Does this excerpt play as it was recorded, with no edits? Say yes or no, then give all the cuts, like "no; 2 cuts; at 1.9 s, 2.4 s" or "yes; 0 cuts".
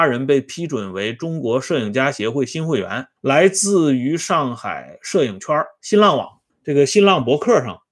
no; 2 cuts; at 3.2 s, 6.5 s